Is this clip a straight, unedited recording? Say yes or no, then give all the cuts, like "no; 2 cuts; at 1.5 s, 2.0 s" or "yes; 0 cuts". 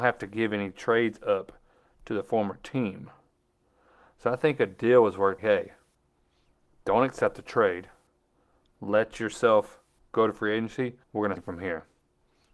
no; 3 cuts; at 5.4 s, 11.0 s, 11.4 s